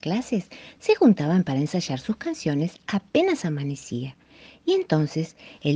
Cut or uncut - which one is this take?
uncut